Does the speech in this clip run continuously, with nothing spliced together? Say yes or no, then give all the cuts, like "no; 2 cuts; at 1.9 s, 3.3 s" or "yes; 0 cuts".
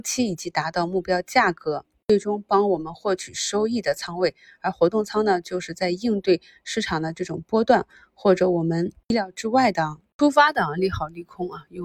yes; 0 cuts